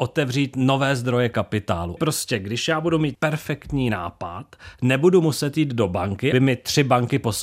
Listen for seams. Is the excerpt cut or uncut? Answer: cut